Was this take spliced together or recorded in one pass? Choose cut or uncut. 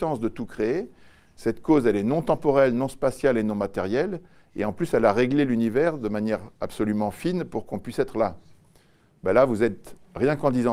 uncut